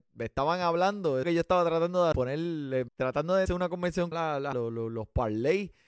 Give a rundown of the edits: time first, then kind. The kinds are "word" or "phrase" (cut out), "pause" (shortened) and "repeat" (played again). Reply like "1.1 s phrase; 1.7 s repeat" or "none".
1.2 s phrase; 2.1 s word; 2.9 s word; 3.5 s word; 4.1 s phrase; 4.5 s phrase